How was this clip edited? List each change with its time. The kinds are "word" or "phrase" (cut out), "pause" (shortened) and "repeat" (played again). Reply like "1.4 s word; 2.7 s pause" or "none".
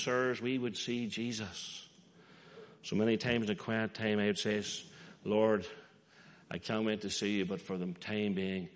none